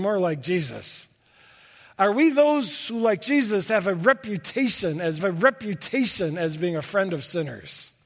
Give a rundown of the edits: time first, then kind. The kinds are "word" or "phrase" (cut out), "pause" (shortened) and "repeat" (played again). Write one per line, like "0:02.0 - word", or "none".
0:05.2 - repeat